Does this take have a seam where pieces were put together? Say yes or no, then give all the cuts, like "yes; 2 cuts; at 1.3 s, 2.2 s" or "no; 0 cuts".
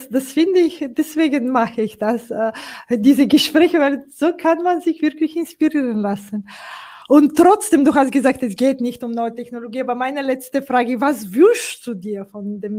no; 0 cuts